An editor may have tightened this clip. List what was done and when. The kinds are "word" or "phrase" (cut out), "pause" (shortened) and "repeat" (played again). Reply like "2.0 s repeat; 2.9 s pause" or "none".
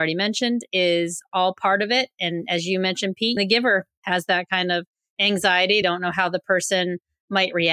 3.4 s word; 5.8 s word